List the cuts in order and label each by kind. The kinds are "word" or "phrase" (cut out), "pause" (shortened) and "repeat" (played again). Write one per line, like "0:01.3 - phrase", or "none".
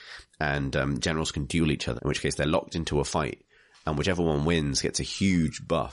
0:02.0 - word